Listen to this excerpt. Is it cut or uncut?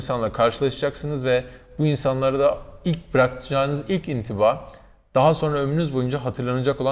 uncut